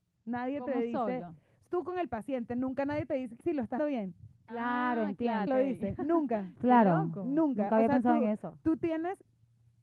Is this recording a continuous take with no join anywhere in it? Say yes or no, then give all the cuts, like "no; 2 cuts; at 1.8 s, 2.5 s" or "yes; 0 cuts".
no; 4 cuts; at 1.7 s, 3.4 s, 3.8 s, 5.5 s